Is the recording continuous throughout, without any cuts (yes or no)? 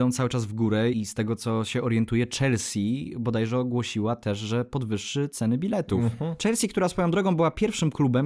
no